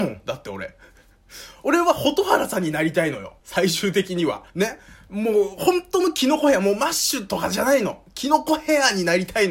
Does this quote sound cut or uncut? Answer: cut